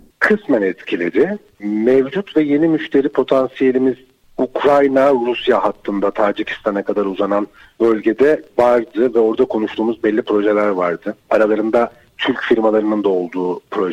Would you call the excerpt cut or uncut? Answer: uncut